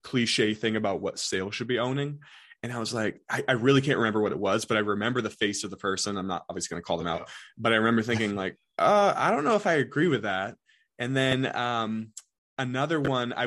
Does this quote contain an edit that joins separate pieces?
no; 0 cuts

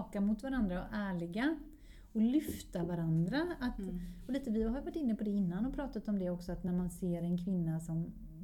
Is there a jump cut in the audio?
no; 0 cuts

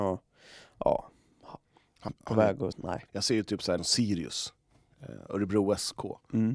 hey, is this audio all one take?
no; 4 cuts; at 2.1 s, 2.7 s, 3.1 s, 3.8 s

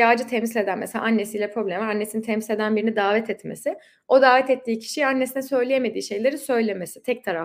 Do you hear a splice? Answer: no; 0 cuts

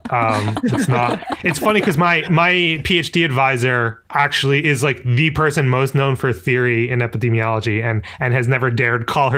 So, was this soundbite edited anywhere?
yes; 1 cut; at 4.1 s

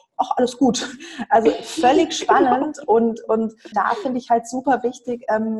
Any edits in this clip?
yes; 1 cut; at 3.7 s

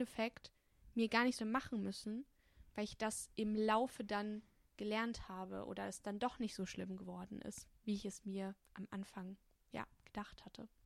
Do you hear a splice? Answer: yes; 3 cuts; at 1.4 s, 7.8 s, 8.6 s

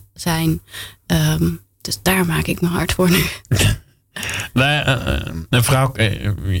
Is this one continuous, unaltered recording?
no; 1 cut; at 1.7 s

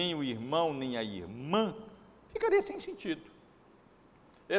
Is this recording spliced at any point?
no; 0 cuts

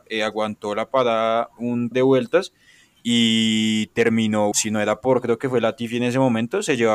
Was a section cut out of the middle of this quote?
yes; 2 cuts; at 1.9 s, 4.5 s

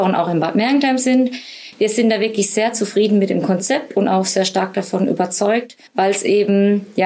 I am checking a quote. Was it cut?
yes; 1 cut; at 5.9 s

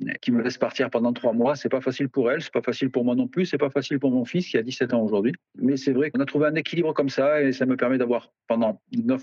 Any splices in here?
yes; 1 cut; at 6.1 s

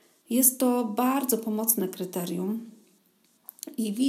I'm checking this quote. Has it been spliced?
no; 0 cuts

